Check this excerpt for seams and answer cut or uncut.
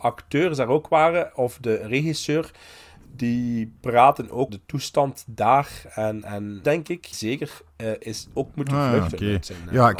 cut